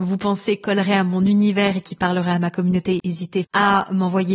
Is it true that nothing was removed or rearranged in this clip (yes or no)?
no